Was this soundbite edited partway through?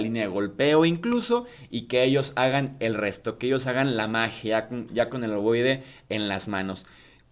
no; 0 cuts

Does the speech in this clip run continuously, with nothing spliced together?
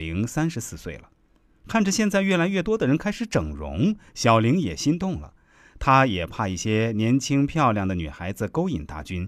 yes; 0 cuts

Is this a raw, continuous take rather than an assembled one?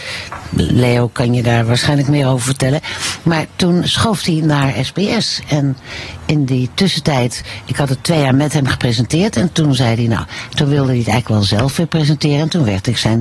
no; 1 cut; at 3.9 s

